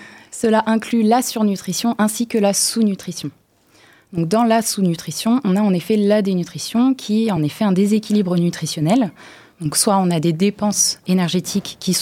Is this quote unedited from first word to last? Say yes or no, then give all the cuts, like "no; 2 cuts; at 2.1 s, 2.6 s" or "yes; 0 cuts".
yes; 0 cuts